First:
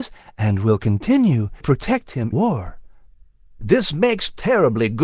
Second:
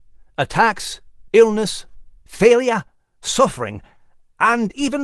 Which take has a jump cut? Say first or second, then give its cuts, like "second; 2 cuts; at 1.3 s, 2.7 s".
first; 2 cuts; at 1.6 s, 2.3 s